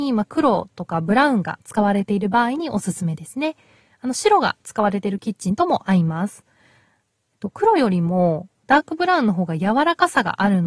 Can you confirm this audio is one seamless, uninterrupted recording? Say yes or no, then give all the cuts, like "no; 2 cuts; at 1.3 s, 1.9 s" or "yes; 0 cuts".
yes; 0 cuts